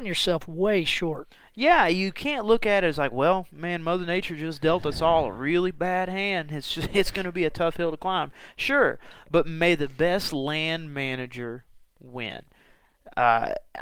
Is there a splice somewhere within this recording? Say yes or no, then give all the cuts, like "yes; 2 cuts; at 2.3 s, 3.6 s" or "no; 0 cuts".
no; 0 cuts